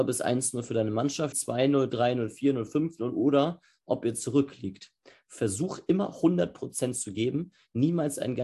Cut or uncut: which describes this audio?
cut